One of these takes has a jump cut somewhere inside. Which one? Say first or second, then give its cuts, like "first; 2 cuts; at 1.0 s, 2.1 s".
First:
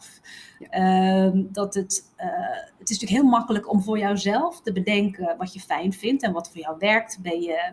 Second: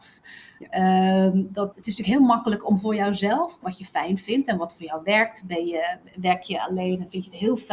second; 2 cuts; at 1.7 s, 3.6 s